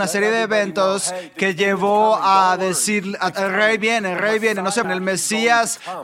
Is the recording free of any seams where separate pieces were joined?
no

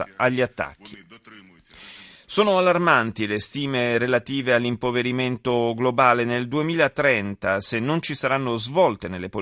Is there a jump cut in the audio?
no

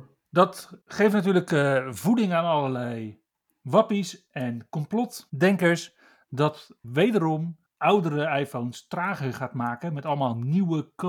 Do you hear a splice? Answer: yes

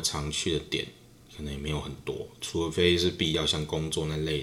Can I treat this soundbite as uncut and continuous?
yes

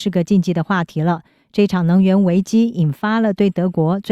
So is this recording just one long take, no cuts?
yes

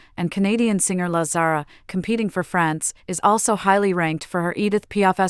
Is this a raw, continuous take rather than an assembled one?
yes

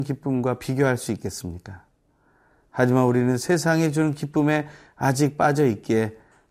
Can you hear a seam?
no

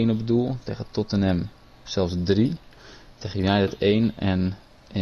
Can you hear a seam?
no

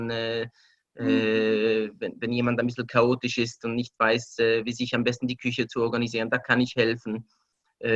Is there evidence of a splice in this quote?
no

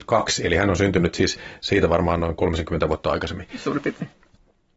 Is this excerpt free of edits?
yes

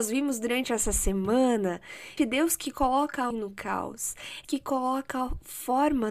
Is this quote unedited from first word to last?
no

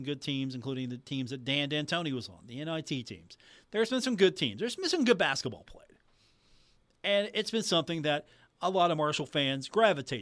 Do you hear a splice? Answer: no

